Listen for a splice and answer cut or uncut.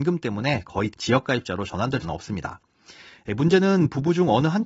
cut